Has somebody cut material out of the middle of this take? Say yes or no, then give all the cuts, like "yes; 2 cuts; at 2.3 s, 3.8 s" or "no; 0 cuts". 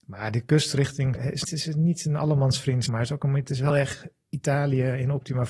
yes; 4 cuts; at 1.1 s, 1.4 s, 2.9 s, 3.7 s